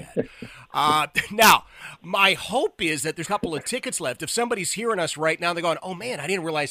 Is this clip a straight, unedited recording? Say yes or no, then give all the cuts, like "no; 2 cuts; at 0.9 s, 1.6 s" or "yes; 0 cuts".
no; 1 cut; at 3.2 s